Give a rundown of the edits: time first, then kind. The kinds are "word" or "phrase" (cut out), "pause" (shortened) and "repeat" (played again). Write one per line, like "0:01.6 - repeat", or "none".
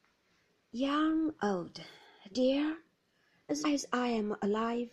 0:01.4 - word
0:02.3 - word
0:03.6 - word